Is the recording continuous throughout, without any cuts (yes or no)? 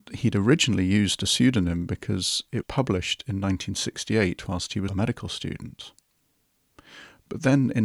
no